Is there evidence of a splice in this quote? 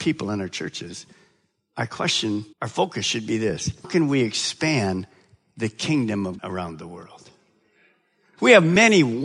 yes; 3 cuts; at 2.5 s, 3.8 s, 6.4 s

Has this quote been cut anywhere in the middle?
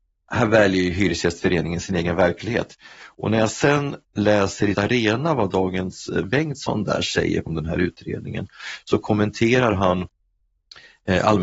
yes; 4 cuts; at 4.0 s, 4.7 s, 6.2 s, 7.5 s

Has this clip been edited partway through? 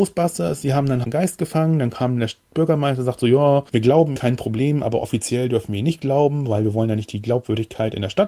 yes; 2 cuts; at 1.0 s, 4.2 s

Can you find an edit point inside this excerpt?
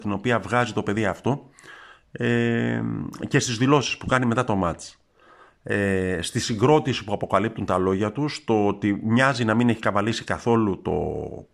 no; 0 cuts

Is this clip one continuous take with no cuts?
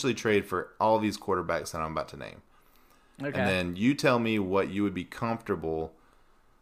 yes; 0 cuts

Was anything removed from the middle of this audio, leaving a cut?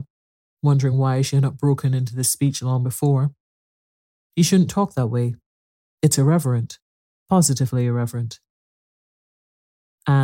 no; 0 cuts

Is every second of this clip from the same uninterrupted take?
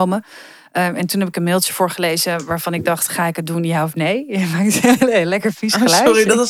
yes; 0 cuts

